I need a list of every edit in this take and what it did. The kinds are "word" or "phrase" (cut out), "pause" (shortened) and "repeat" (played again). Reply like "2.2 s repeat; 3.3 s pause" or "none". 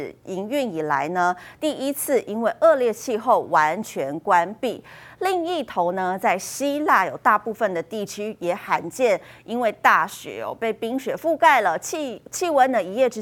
none

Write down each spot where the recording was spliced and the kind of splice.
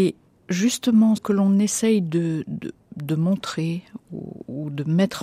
1.2 s phrase

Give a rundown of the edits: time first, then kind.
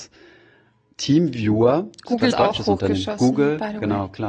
2.3 s word

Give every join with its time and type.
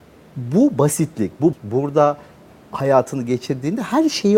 1.5 s word

